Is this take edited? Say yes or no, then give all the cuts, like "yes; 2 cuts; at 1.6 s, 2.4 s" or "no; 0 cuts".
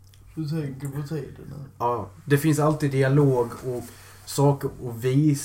no; 0 cuts